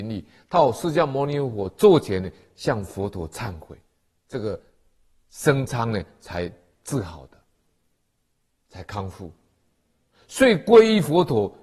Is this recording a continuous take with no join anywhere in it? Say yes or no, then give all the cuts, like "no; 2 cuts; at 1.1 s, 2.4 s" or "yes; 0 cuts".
yes; 0 cuts